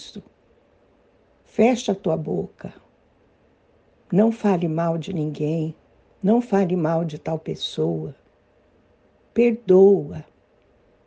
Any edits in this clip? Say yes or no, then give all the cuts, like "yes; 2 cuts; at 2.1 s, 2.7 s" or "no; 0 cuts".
yes; 1 cut; at 5.9 s